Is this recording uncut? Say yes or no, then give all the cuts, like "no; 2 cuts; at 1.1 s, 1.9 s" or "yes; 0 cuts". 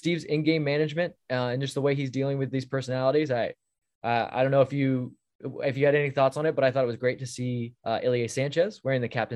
no; 1 cut; at 7.8 s